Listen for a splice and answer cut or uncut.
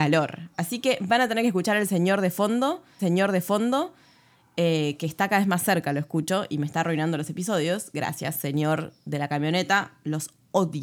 cut